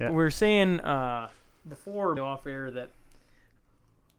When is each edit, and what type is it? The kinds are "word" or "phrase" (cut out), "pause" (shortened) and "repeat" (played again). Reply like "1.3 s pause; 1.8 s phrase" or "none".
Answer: 2.2 s word